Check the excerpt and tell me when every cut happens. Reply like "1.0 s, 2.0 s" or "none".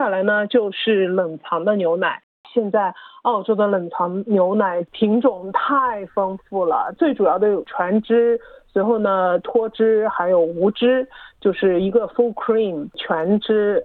none